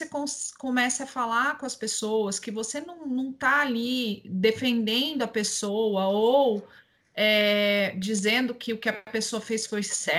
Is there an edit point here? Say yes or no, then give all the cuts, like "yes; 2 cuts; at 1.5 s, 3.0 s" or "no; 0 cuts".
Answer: no; 0 cuts